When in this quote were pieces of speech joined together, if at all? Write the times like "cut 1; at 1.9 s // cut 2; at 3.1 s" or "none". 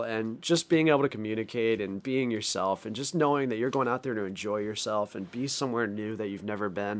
none